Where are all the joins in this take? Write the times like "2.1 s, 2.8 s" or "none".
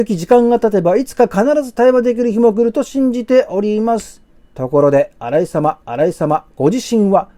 4.3 s, 5.8 s